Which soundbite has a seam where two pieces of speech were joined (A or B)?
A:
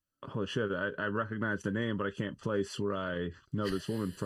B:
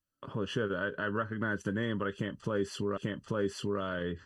B